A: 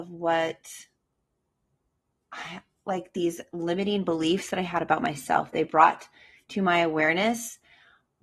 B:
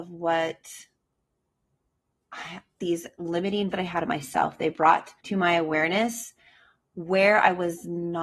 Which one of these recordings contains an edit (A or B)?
B